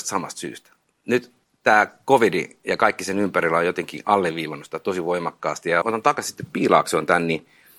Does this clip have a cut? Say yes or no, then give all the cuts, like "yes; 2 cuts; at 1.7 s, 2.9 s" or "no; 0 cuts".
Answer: yes; 1 cut; at 5.8 s